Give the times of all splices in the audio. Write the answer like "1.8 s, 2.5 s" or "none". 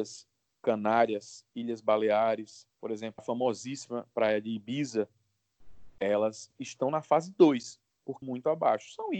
2.7 s, 3.2 s, 5.9 s, 8.2 s